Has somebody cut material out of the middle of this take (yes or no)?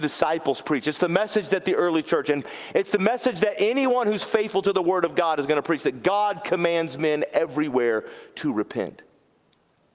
no